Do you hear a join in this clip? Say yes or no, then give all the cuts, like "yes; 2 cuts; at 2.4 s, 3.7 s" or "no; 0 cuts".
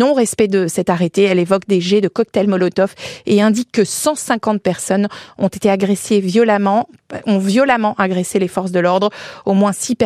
no; 0 cuts